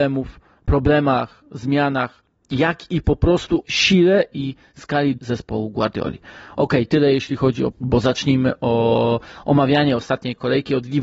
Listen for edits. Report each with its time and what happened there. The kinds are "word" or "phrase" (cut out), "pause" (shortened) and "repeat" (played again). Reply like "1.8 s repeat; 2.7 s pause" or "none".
3.6 s word; 5.2 s word; 7.7 s phrase